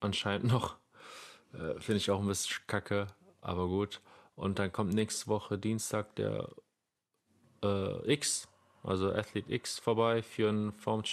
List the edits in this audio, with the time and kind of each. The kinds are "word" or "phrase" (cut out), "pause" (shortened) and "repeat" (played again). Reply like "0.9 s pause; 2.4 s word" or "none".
none

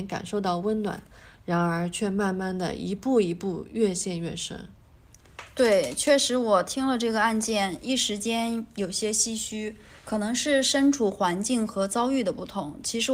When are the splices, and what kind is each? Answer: 10.0 s pause

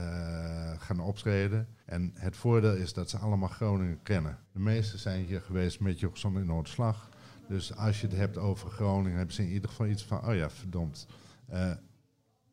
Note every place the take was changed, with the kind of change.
1.8 s pause; 4.4 s pause

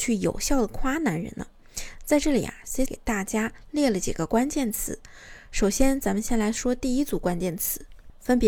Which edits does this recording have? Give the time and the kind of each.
2.9 s word

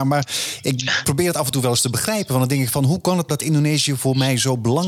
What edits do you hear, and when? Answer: 1.0 s word; 3.3 s word

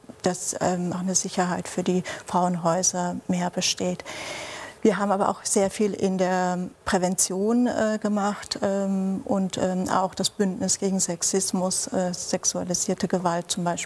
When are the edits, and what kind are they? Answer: 0.9 s word; 4.8 s pause; 6.7 s pause

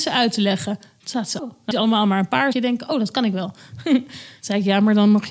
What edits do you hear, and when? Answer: 1.4 s word; 1.7 s word; 2.5 s word

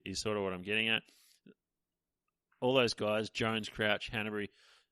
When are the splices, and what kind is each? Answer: none

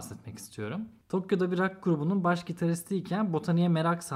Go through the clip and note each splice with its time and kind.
none

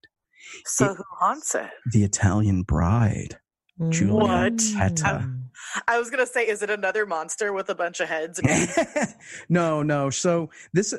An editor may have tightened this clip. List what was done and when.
1.8 s pause

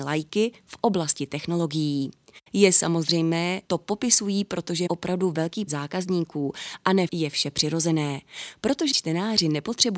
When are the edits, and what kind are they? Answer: 2.5 s pause; 3.7 s phrase; 4.9 s word; 5.7 s word; 7.1 s word; 8.9 s word

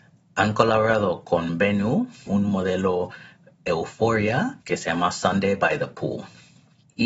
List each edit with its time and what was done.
2.3 s phrase; 4.6 s pause

